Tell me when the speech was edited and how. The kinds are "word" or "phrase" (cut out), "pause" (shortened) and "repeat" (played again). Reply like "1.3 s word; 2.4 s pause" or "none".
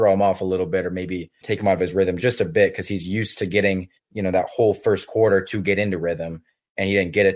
1.4 s word; 2.2 s word; 4.0 s pause

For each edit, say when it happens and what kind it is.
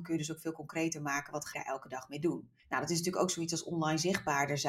1.5 s word

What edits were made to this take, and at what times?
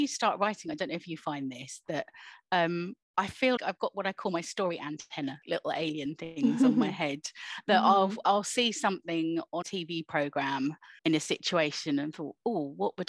3.0 s pause; 3.6 s word; 5.4 s word; 9.6 s word; 11.0 s pause

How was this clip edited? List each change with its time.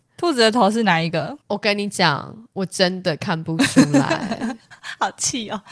1.4 s pause

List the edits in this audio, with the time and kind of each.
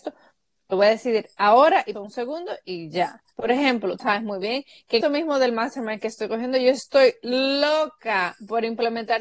1.9 s word; 3.3 s pause; 4.0 s word; 5.0 s word

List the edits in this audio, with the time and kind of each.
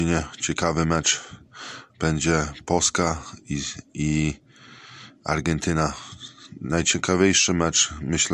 1.9 s pause

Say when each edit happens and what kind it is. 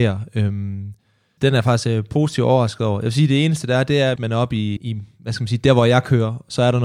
1.4 s word; 4.2 s word; 4.8 s word

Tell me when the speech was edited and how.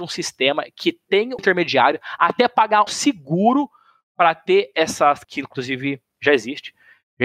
1.4 s word; 2.9 s word; 5.2 s word

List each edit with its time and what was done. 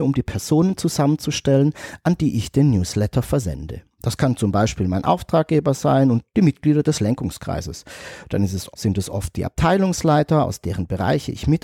8.7 s pause

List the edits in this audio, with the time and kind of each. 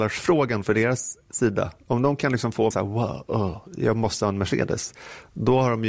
1.8 s pause; 2.7 s word

